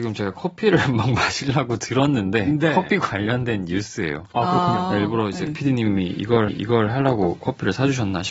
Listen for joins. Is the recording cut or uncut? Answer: cut